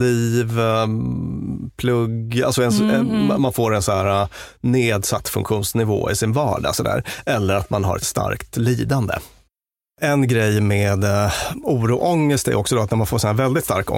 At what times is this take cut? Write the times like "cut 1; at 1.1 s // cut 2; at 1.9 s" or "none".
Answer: none

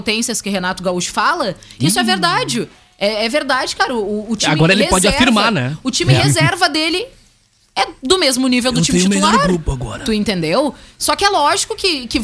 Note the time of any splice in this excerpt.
none

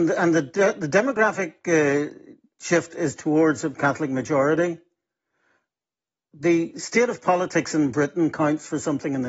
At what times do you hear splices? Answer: none

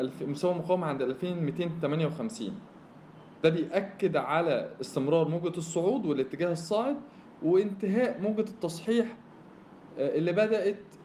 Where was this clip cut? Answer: cut 1; at 3.4 s

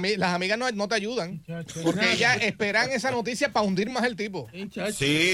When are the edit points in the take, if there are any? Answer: none

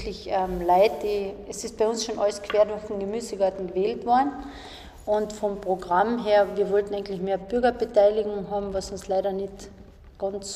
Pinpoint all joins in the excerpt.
none

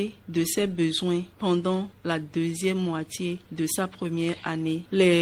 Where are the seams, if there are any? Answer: none

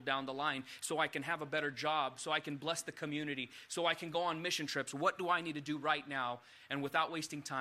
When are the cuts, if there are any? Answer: none

